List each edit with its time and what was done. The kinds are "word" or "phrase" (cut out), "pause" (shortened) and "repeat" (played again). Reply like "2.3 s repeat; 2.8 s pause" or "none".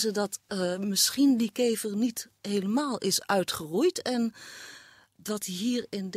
none